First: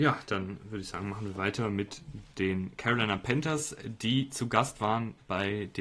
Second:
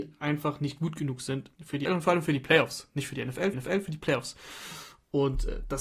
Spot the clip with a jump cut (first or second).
second